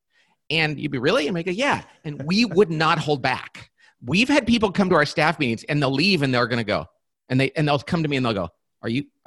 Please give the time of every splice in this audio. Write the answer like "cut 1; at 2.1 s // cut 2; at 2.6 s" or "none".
none